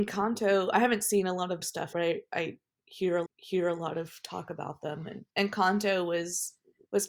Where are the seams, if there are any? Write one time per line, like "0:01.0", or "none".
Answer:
0:01.6
0:01.9
0:03.3
0:05.3